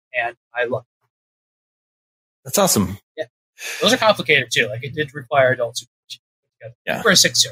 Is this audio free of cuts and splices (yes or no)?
no